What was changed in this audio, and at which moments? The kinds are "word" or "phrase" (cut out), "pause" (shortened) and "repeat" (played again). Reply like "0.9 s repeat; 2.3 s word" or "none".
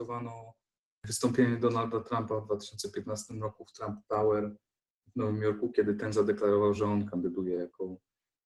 none